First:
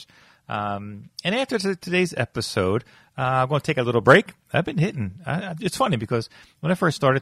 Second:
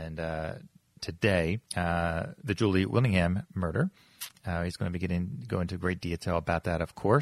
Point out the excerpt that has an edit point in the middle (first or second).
second